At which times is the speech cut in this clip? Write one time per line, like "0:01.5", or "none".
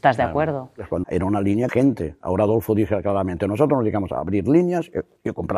0:01.0
0:01.7